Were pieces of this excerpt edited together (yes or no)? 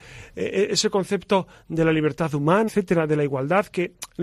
yes